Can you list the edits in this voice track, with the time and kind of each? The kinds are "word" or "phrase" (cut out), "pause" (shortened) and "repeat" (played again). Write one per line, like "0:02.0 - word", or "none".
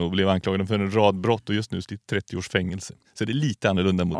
0:01.8 - phrase